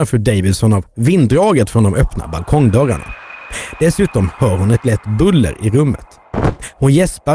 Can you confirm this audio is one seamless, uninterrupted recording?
yes; 0 cuts

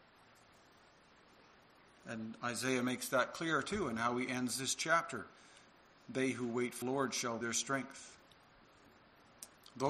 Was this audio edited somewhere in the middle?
yes; 2 cuts; at 6.8 s, 7.4 s

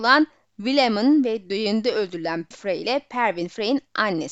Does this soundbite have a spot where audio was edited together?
yes; 1 cut; at 2.5 s

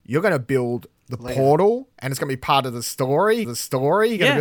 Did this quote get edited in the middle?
yes; 1 cut; at 3.4 s

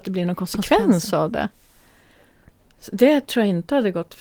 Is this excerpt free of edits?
yes; 0 cuts

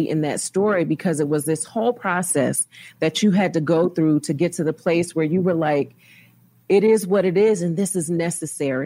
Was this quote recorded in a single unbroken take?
yes; 0 cuts

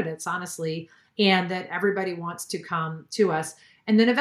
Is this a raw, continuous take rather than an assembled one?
yes; 0 cuts

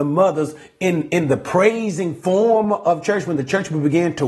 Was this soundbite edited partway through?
no; 0 cuts

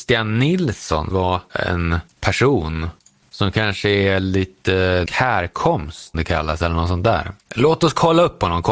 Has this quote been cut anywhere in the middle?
yes; 4 cuts; at 1.1 s, 2.1 s, 5.1 s, 6.1 s

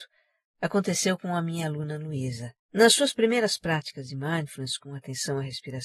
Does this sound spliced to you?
yes; 1 cut; at 2.6 s

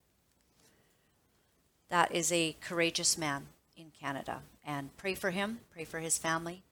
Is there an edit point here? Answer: no; 0 cuts

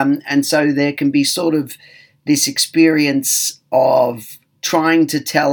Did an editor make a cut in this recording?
no; 0 cuts

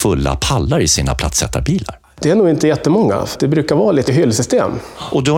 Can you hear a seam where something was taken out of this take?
yes; 2 cuts; at 3.3 s, 4.1 s

